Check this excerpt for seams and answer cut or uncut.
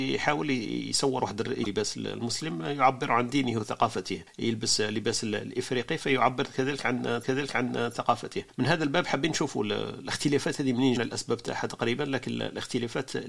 cut